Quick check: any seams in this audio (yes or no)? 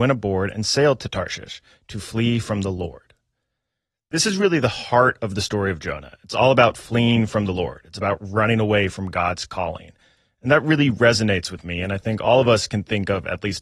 no